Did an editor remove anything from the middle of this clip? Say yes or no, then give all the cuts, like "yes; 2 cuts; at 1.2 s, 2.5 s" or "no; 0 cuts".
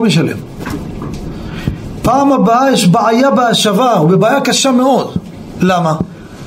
no; 0 cuts